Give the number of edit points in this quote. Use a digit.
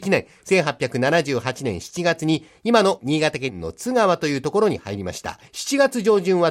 1